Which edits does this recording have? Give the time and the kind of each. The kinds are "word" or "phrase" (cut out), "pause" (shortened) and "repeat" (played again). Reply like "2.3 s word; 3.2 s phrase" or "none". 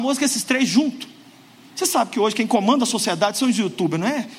none